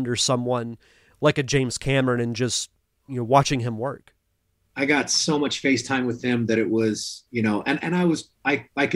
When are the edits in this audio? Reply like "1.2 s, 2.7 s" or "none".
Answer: 7.3 s